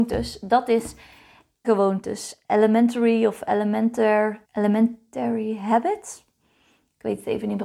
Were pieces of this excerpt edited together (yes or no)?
yes